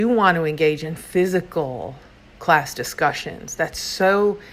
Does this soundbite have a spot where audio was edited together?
no; 0 cuts

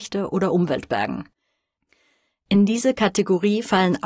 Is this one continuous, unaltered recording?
yes; 0 cuts

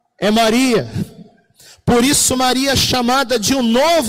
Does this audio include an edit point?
no; 0 cuts

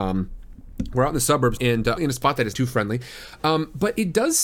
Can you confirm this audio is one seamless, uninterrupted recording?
no; 3 cuts; at 1.6 s, 2.0 s, 2.5 s

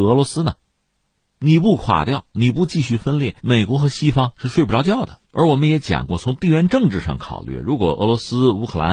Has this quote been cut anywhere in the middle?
yes; 2 cuts; at 3.4 s, 5.2 s

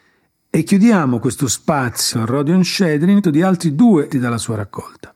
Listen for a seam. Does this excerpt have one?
yes; 3 cuts; at 2.1 s, 3.2 s, 4.1 s

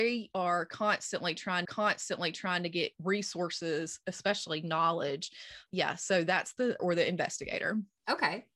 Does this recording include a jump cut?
yes; 4 cuts; at 1.6 s, 2.9 s, 5.7 s, 6.8 s

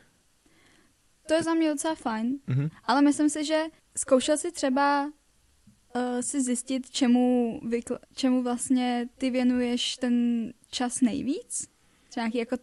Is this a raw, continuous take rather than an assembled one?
no; 3 cuts; at 3.8 s, 8.0 s, 9.1 s

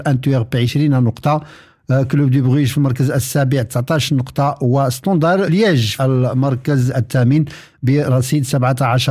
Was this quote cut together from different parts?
yes; 2 cuts; at 5.5 s, 6.0 s

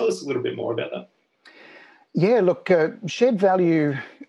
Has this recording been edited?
no; 0 cuts

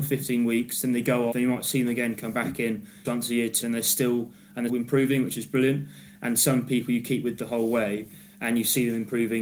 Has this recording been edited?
yes; 4 cuts; at 1.3 s, 3.0 s, 3.6 s, 4.7 s

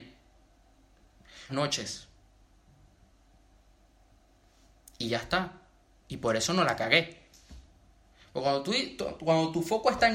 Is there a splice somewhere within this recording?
yes; 1 cut; at 1.5 s

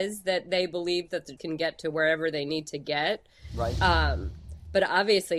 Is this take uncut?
no; 1 cut; at 1.4 s

